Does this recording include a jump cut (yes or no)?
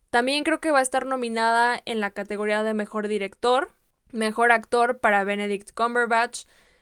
no